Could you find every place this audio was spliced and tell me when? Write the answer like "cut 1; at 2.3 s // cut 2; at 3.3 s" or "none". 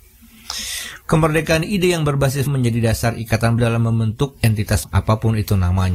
cut 1; at 2.5 s // cut 2; at 3.6 s // cut 3; at 4.8 s